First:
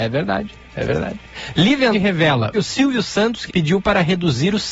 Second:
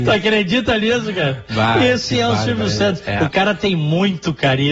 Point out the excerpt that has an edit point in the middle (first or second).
first